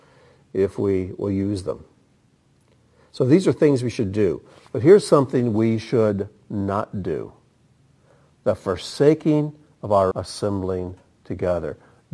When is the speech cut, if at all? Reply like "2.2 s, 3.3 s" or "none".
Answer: 10.1 s